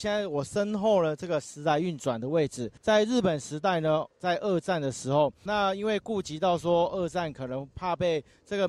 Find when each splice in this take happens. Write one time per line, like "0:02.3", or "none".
0:02.8
0:05.5
0:07.7